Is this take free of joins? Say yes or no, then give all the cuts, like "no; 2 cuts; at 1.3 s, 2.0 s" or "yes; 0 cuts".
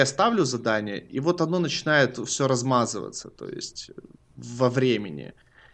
yes; 0 cuts